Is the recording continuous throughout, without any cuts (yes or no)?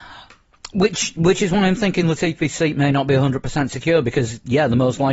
yes